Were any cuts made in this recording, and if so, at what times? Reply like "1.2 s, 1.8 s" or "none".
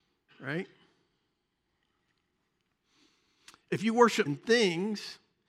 4.3 s